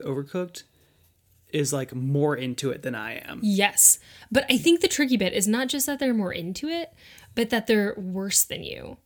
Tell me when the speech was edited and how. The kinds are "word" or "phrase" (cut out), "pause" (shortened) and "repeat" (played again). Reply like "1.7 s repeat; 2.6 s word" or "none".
none